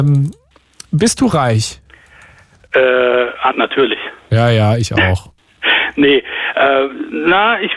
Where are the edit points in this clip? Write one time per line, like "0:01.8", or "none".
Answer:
0:03.5